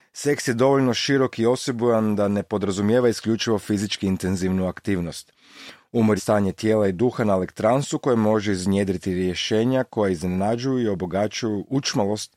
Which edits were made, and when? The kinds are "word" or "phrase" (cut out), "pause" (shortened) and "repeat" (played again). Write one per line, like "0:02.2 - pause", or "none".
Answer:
0:06.2 - word